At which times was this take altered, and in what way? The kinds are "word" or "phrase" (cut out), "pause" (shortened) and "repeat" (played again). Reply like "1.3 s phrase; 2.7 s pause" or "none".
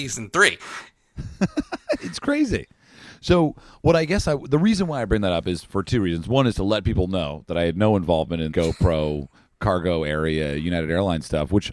5.7 s word; 8.5 s word; 9.3 s pause